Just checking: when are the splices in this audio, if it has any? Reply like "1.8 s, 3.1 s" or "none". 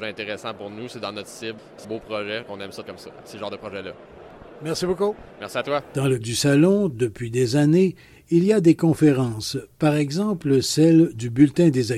1.8 s, 2.4 s, 2.8 s, 6.2 s